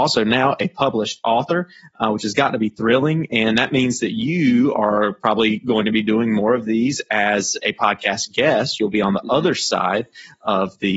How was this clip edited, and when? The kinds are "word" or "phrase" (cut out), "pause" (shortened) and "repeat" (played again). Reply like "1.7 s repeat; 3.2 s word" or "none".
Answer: none